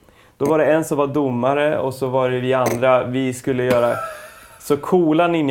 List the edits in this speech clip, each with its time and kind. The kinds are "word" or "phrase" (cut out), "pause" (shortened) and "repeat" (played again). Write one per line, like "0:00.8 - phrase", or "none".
none